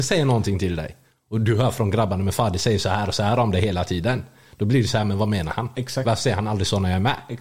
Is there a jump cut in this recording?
no; 0 cuts

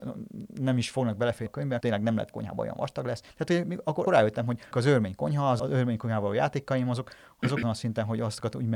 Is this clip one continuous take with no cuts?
no; 8 cuts; at 1.5 s, 1.8 s, 2.3 s, 3.3 s, 4.1 s, 4.7 s, 5.6 s, 7.6 s

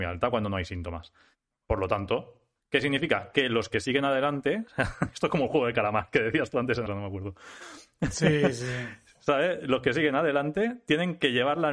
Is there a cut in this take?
yes; 1 cut; at 6.9 s

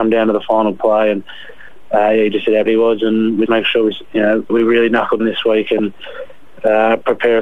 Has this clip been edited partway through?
yes; 4 cuts; at 2.7 s, 3.5 s, 4.5 s, 5.2 s

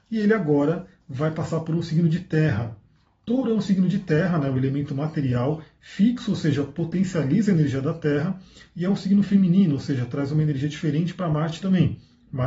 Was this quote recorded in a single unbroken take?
yes; 0 cuts

